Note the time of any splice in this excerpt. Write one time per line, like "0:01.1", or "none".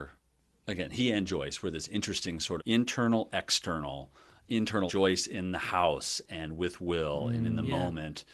0:02.6
0:04.9